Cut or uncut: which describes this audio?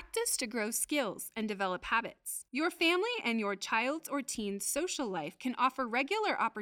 cut